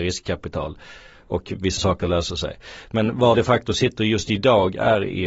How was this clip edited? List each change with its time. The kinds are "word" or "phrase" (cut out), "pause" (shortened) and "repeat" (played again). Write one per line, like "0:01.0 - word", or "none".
0:01.8 - word
0:03.3 - word